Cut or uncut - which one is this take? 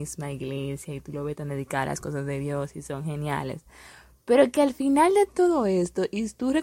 uncut